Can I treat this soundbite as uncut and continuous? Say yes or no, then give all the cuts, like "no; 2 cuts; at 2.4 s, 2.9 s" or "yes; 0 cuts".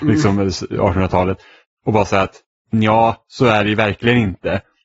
yes; 0 cuts